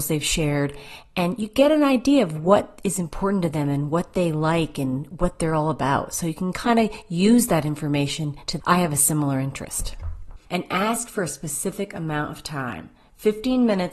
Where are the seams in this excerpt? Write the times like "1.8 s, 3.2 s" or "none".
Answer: 8.6 s, 10.4 s